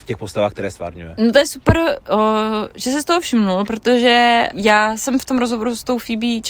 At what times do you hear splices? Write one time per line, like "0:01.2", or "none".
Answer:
0:04.5